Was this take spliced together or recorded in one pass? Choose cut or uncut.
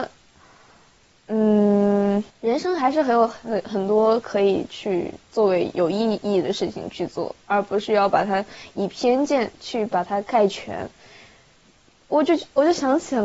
cut